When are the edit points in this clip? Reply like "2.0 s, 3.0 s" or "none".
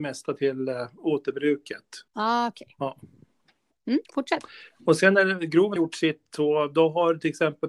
2.1 s, 4.0 s, 5.8 s